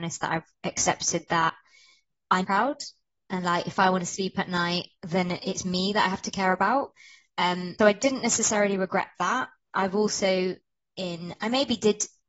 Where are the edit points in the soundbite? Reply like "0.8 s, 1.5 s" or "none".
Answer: 2.4 s, 5.0 s, 7.8 s

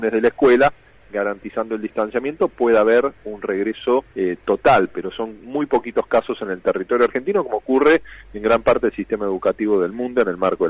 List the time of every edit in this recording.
4.1 s

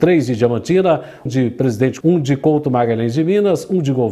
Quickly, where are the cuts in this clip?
1.3 s, 2.0 s

